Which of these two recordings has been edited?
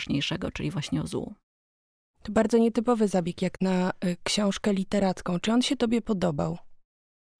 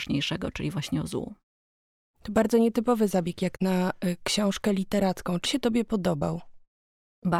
second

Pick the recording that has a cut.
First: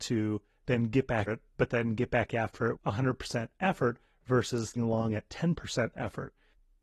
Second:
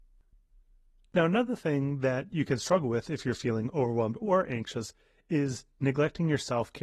first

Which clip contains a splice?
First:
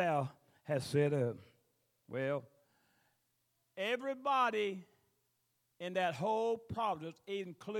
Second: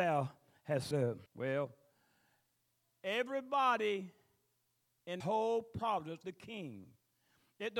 second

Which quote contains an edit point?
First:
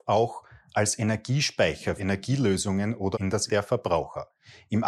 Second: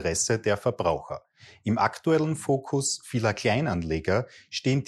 first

